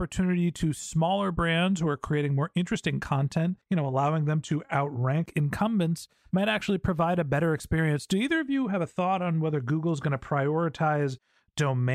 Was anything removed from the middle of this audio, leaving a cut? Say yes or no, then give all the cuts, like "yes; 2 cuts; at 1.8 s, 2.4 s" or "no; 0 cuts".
yes; 1 cut; at 3.6 s